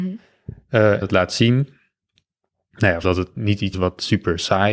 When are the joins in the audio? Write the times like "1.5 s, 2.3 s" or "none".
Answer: 1.0 s, 3.0 s, 3.7 s